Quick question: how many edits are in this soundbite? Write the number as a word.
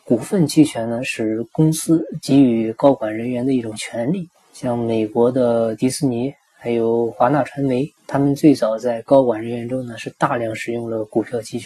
two